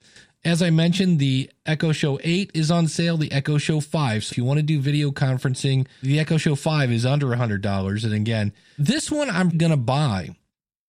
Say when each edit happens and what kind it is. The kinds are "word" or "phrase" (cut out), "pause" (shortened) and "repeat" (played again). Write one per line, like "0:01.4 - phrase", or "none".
0:04.3 - word
0:06.0 - word
0:08.8 - word
0:09.5 - word